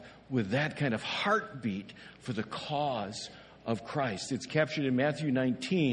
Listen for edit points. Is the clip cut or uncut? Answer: uncut